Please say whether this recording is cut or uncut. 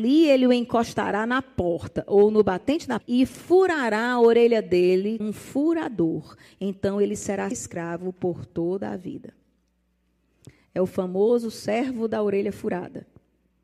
cut